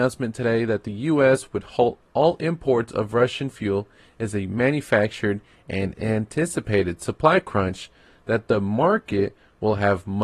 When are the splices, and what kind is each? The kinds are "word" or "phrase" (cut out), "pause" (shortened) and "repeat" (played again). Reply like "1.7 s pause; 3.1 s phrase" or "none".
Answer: none